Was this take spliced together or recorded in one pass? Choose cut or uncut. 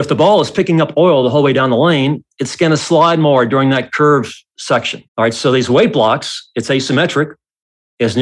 cut